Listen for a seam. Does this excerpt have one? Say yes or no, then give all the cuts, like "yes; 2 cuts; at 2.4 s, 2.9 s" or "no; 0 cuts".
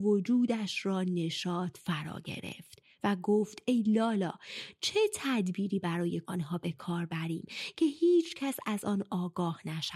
yes; 1 cut; at 6.2 s